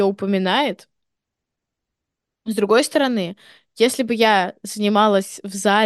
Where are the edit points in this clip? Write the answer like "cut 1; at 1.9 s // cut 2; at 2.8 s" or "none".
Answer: none